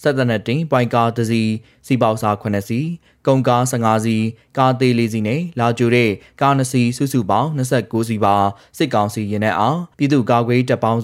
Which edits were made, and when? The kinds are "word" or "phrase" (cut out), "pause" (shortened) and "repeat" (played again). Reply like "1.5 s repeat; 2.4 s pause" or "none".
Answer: 9.9 s pause